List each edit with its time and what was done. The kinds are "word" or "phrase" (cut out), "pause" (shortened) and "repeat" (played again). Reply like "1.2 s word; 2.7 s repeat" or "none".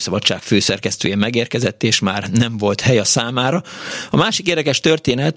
none